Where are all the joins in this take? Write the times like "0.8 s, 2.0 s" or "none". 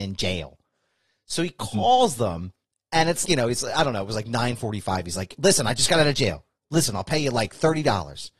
3.2 s